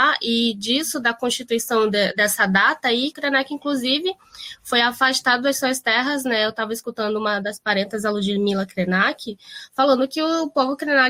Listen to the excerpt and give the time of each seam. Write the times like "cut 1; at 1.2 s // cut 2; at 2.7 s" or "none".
cut 1; at 3.1 s